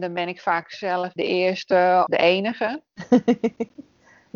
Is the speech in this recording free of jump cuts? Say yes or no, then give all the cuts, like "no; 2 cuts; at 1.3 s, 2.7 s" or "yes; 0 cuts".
no; 2 cuts; at 1.2 s, 2.1 s